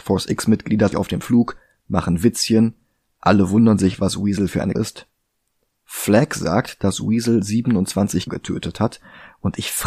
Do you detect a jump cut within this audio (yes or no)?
yes